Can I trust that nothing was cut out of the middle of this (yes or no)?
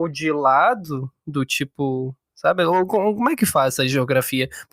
yes